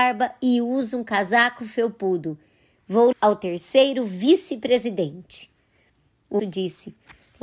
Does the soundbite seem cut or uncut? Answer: cut